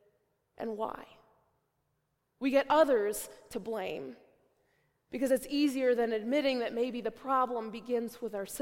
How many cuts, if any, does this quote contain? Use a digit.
0